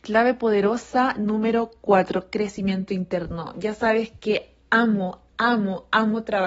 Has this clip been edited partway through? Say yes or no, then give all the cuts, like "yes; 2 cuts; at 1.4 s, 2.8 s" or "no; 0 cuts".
no; 0 cuts